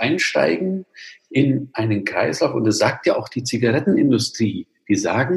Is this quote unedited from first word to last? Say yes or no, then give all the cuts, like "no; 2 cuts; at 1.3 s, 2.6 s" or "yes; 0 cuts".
yes; 0 cuts